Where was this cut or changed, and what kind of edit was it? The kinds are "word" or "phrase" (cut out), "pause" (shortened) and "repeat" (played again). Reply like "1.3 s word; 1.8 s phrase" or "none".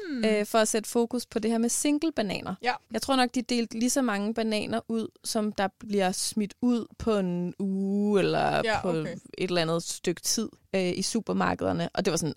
2.8 s pause; 10.5 s pause